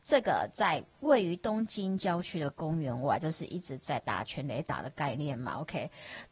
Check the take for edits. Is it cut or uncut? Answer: cut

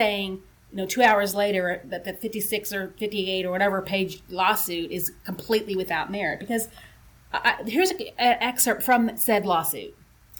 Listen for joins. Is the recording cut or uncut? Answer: uncut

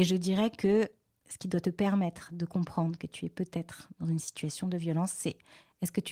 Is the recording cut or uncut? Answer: uncut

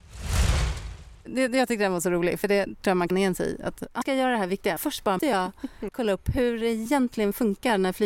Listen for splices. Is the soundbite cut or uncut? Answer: cut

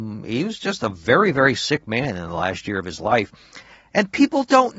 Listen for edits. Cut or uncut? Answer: uncut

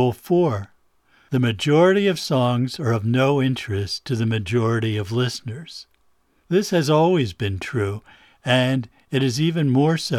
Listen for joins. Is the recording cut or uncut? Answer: uncut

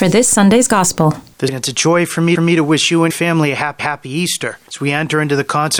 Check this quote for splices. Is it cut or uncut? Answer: cut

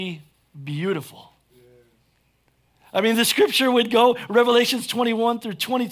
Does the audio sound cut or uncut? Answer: uncut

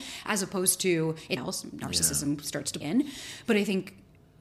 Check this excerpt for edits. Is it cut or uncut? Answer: cut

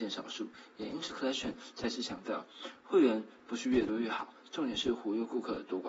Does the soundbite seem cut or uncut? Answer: cut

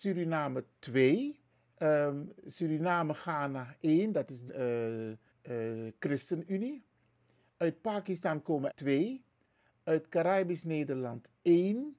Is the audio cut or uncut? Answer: cut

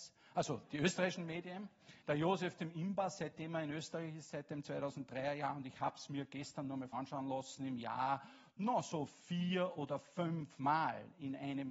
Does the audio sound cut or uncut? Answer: cut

